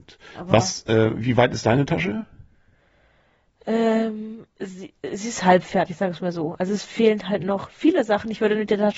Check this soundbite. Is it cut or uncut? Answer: cut